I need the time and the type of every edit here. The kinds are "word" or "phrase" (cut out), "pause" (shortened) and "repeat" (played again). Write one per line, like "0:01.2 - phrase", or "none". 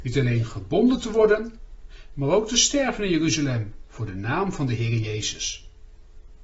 none